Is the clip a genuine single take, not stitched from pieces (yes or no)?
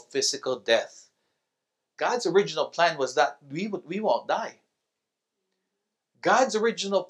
yes